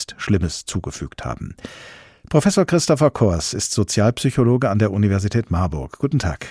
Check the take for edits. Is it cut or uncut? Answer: uncut